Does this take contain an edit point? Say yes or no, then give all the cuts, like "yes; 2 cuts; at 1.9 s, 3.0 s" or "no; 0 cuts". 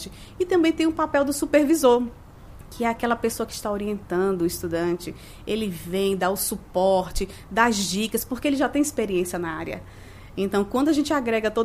no; 0 cuts